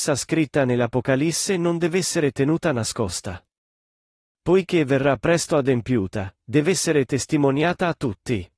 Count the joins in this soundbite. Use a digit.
0